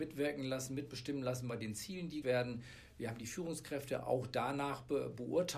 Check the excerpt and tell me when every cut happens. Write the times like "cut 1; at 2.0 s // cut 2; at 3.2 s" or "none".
cut 1; at 2.2 s